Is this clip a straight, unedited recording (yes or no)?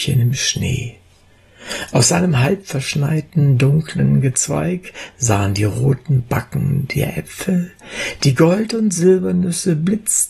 yes